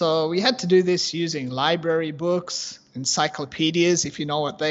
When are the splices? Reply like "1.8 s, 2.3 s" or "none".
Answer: none